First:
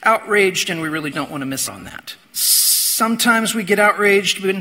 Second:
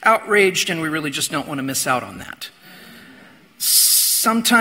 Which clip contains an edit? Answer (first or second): first